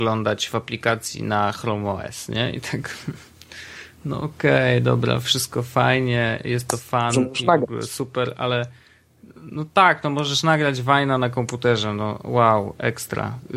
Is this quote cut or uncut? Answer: uncut